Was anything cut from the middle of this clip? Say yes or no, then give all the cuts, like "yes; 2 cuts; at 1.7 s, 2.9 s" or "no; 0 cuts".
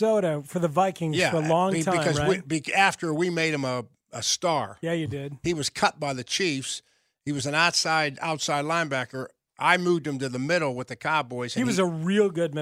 no; 0 cuts